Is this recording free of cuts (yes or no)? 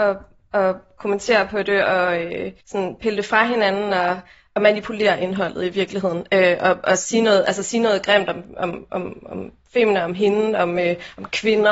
no